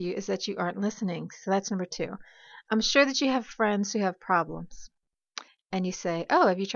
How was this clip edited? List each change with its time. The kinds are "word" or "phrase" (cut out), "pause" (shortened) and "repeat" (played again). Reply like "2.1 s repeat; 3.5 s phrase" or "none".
5.5 s pause